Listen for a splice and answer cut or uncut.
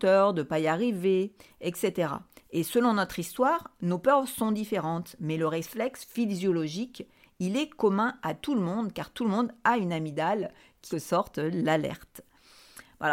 cut